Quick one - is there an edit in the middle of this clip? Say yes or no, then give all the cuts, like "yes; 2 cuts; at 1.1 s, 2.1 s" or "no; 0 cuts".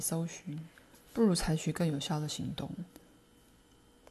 yes; 1 cut; at 0.9 s